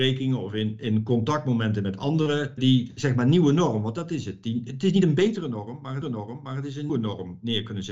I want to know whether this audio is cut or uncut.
cut